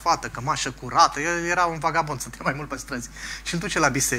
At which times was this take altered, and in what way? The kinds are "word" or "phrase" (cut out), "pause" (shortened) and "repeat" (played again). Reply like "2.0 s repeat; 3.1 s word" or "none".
none